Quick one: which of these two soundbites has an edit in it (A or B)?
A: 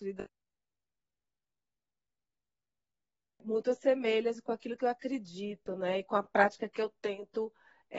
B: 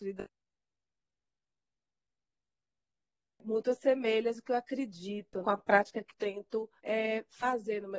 B